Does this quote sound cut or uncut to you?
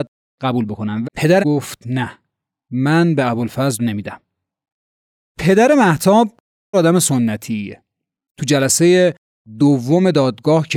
cut